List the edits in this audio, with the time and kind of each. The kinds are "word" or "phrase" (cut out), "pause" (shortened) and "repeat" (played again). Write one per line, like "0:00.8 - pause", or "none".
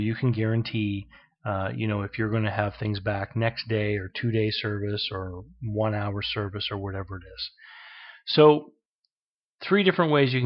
none